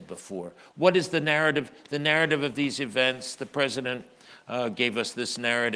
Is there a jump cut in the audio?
no; 0 cuts

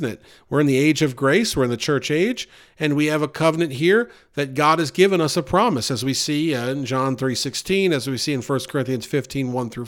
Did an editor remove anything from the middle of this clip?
no; 0 cuts

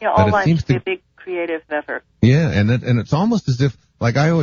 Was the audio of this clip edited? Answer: yes; 2 cuts; at 1.7 s, 2.1 s

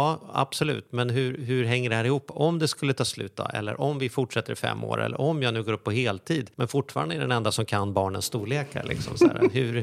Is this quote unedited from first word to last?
no; 1 cut; at 6.5 s

